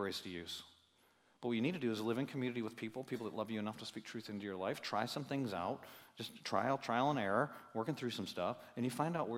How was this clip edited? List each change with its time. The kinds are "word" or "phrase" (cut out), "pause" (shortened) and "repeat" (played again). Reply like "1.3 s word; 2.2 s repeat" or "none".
none